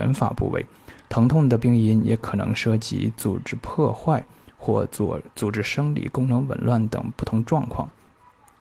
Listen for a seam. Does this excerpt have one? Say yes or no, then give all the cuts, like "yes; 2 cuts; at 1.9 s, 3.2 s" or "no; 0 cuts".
yes; 1 cut; at 5.3 s